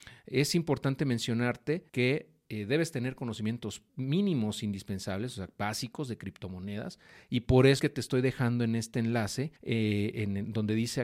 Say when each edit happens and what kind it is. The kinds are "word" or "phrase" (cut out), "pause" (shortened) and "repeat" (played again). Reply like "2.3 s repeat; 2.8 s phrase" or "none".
1.9 s pause; 3.9 s pause; 7.8 s word; 9.6 s pause